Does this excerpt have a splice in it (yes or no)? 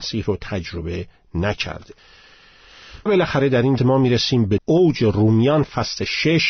yes